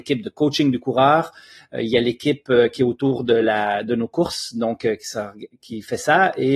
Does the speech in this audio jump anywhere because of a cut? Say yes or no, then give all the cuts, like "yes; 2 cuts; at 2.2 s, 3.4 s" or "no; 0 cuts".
no; 0 cuts